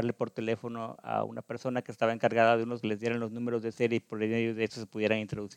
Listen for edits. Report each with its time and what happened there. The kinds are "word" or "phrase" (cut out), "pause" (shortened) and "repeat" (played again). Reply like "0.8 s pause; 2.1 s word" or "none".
2.8 s phrase